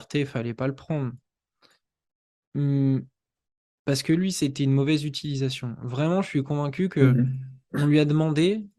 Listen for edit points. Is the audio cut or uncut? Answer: uncut